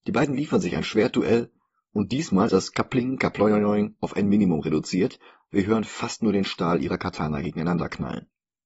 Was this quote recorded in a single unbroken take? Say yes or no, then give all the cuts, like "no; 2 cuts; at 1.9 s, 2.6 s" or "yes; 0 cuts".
no; 1 cut; at 2.5 s